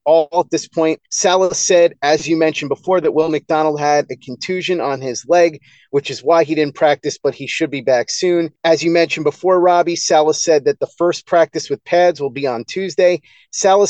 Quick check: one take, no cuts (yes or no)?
no